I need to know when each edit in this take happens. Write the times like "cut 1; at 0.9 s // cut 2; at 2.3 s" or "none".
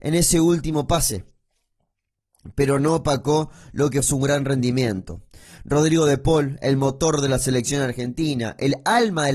cut 1; at 4.0 s